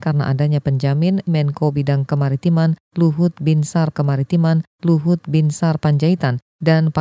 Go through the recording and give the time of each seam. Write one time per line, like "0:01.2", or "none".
0:01.3
0:03.9